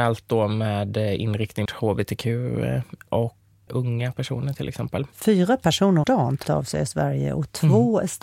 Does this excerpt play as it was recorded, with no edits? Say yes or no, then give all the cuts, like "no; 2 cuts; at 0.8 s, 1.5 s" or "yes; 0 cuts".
no; 5 cuts; at 1.7 s, 3.7 s, 5.1 s, 6.0 s, 6.4 s